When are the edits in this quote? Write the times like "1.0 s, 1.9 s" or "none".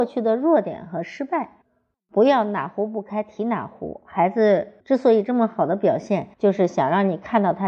4.8 s, 6.3 s